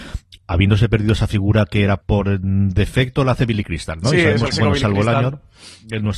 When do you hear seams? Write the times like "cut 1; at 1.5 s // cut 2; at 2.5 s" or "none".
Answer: cut 1; at 2.0 s // cut 2; at 4.5 s